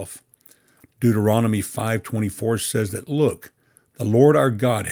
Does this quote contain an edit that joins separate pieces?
no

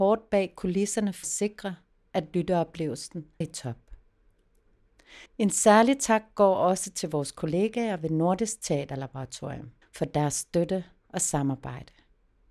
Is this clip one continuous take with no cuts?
no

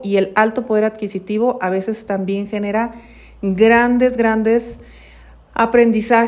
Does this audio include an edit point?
no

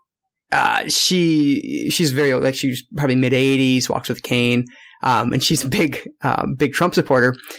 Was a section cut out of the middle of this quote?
no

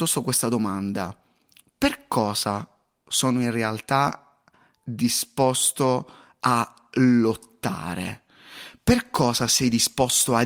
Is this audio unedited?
yes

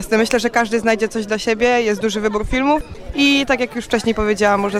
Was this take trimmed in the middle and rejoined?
no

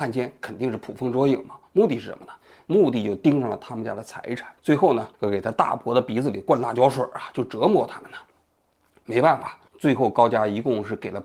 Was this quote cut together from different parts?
yes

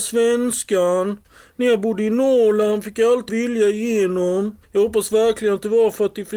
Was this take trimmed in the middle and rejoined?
yes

